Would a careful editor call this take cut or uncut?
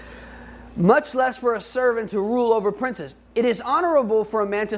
uncut